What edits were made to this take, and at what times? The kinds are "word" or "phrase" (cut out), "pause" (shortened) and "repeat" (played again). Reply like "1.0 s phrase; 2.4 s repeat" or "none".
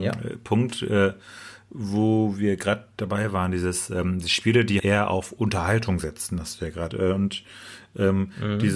4.8 s word; 6.9 s word